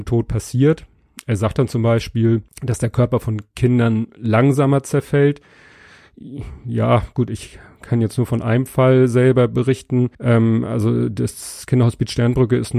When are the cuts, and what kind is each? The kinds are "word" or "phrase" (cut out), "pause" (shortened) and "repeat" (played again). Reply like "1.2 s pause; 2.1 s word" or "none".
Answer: 2.5 s pause; 10.1 s pause